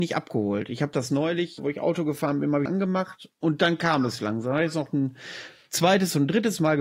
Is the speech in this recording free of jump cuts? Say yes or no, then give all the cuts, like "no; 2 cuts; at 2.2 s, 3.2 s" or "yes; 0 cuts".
no; 2 cuts; at 1.6 s, 2.6 s